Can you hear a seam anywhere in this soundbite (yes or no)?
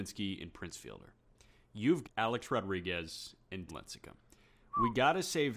yes